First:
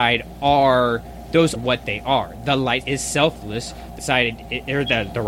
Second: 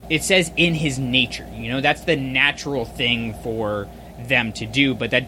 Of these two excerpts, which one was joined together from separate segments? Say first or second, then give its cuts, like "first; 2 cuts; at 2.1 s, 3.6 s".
first; 3 cuts; at 1.6 s, 2.8 s, 4.0 s